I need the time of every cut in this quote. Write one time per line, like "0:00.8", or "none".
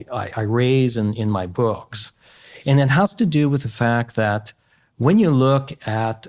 none